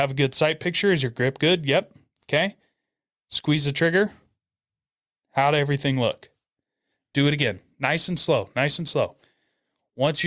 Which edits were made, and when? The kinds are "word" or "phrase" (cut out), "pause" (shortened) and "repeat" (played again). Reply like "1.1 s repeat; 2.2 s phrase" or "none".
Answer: none